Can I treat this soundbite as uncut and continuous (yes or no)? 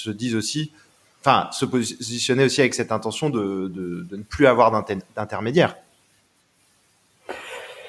yes